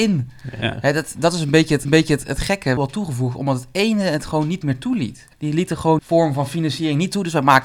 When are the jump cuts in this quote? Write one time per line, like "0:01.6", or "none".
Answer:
0:01.8
0:02.8
0:05.3
0:06.0